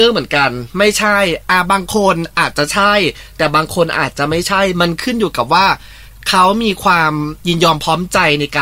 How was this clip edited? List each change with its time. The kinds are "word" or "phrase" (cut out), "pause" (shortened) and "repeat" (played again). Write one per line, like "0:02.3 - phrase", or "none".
0:07.4 - pause